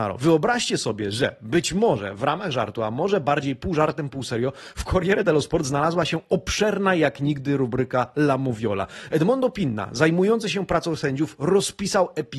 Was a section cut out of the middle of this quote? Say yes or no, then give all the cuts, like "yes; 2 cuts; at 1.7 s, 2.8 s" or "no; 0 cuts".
no; 0 cuts